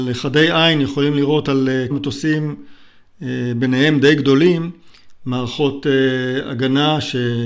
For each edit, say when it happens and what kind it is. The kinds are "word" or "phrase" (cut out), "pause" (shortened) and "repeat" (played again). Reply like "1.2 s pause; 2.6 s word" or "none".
1.9 s word